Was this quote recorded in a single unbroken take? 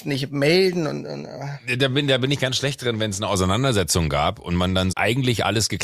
no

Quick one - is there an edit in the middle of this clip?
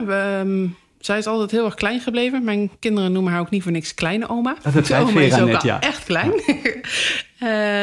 no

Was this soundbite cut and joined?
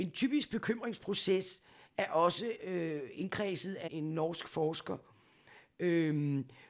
yes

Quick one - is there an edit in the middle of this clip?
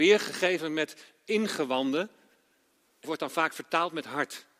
yes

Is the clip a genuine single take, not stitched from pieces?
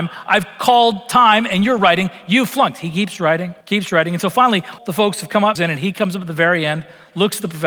no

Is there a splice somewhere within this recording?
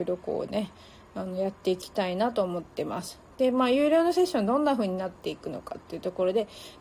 yes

